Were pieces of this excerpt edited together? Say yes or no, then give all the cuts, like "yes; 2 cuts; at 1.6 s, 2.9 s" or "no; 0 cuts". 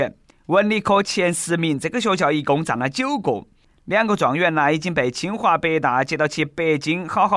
no; 0 cuts